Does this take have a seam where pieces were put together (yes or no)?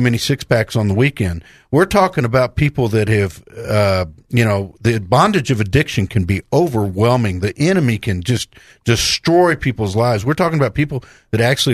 no